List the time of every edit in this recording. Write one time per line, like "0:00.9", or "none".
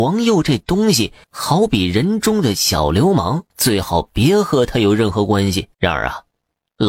0:01.2
0:03.5
0:05.7